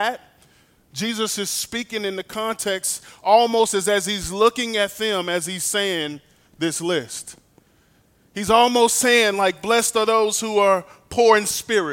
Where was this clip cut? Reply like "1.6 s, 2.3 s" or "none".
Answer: none